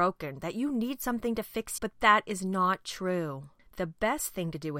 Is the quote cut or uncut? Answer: cut